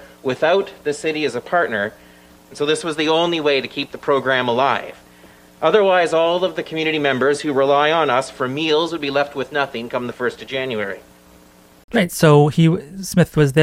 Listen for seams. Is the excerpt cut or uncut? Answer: uncut